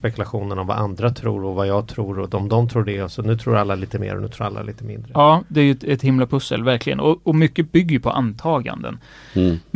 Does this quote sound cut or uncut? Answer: uncut